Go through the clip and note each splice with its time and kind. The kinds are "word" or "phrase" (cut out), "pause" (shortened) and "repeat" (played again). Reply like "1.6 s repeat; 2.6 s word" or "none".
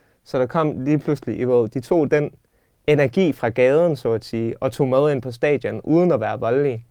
none